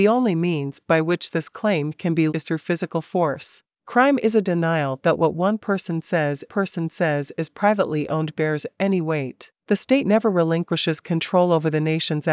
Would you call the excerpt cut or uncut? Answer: cut